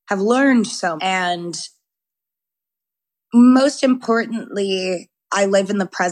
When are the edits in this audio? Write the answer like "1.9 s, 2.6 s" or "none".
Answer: 1.0 s